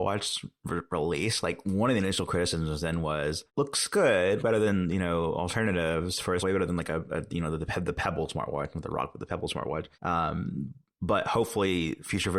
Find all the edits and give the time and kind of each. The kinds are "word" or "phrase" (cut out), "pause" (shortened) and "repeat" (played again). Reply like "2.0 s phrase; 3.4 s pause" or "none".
3.5 s pause; 4.4 s word; 6.4 s word; 9.9 s pause